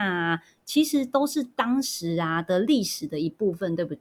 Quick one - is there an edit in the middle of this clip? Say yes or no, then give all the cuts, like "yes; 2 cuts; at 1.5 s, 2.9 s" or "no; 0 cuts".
no; 0 cuts